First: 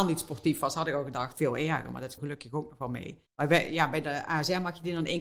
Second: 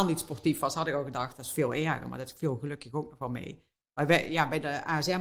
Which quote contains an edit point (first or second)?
first